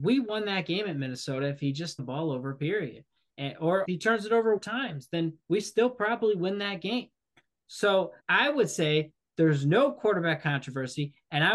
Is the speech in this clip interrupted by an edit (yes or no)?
yes